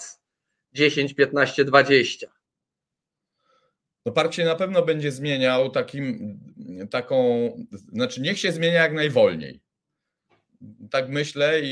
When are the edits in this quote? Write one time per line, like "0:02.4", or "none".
none